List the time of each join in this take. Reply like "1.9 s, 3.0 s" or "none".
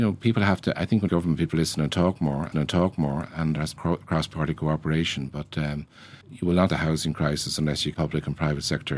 1.1 s, 1.5 s, 2.5 s, 3.8 s, 6.2 s, 6.7 s, 7.9 s